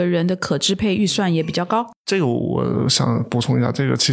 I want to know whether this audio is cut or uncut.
uncut